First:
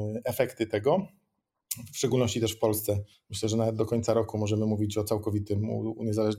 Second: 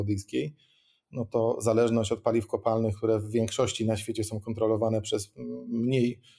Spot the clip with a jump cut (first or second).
first